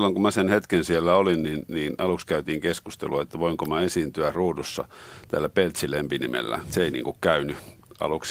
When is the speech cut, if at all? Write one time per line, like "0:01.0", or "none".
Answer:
none